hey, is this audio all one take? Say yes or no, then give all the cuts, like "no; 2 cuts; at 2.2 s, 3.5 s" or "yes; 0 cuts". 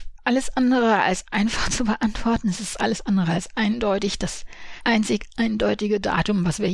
yes; 0 cuts